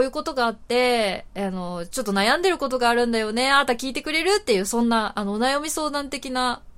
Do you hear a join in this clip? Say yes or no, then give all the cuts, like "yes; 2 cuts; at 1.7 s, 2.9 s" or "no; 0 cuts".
no; 0 cuts